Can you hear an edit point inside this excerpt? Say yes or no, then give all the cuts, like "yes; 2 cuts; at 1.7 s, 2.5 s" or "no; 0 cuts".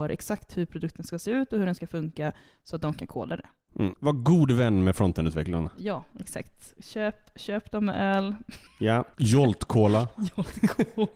no; 0 cuts